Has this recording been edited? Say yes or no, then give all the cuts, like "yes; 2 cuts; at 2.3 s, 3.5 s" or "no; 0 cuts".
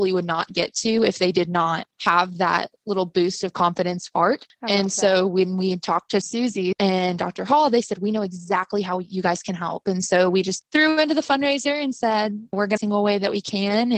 yes; 3 cuts; at 1.9 s, 4.1 s, 12.8 s